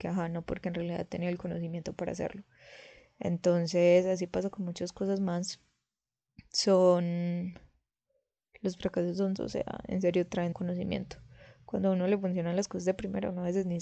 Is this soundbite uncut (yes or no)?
no